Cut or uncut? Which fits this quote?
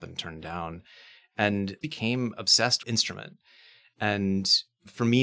cut